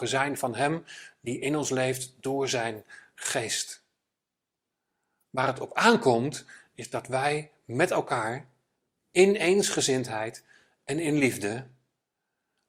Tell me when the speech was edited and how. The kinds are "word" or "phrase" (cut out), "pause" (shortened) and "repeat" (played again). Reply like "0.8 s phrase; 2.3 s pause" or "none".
none